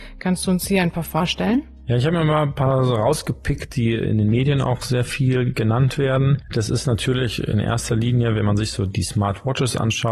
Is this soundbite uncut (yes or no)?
yes